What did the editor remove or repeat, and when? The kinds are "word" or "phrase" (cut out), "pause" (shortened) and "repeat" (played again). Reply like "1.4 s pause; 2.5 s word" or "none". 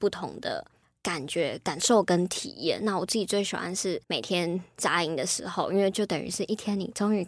4.0 s pause